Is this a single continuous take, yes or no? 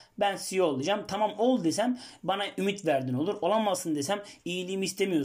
yes